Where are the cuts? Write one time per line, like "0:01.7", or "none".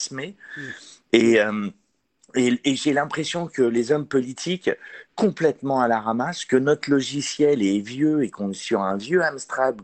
0:02.6
0:05.1